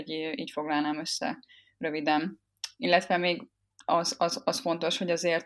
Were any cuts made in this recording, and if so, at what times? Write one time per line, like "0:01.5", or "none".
none